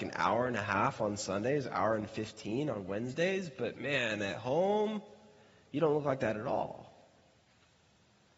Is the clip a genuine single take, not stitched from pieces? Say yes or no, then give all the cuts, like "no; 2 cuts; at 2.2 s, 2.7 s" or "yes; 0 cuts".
yes; 0 cuts